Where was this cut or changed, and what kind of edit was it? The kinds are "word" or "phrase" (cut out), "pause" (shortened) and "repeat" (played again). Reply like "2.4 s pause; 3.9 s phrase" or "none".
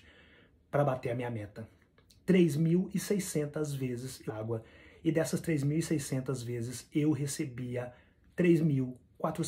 4.3 s word

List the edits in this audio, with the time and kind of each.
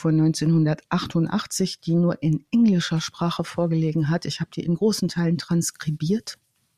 none

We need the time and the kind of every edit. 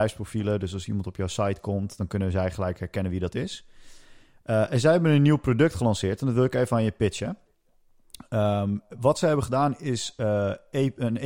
none

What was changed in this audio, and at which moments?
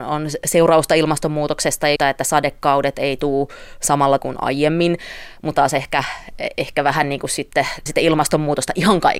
2.0 s word; 4.2 s word; 5.5 s word; 7.9 s word

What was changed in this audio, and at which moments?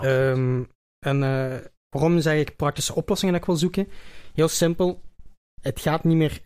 1.8 s pause

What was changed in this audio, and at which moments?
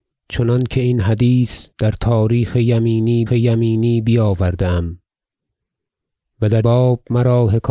1.7 s pause; 3.3 s repeat; 6.6 s word

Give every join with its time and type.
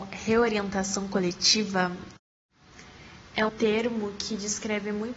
3.5 s word

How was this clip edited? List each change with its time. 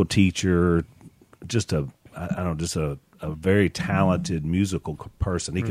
none

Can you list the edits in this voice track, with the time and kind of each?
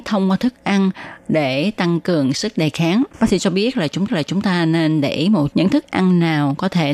3.1 s pause; 4.1 s repeat; 5.5 s word

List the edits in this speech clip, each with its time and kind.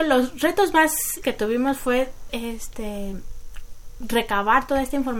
1.2 s word; 2.3 s word; 4.0 s word

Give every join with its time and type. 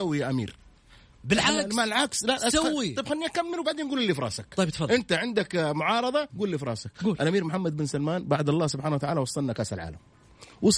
6.3 s pause

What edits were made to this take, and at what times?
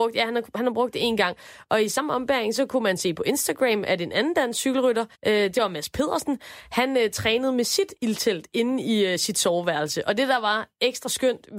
5.1 s pause

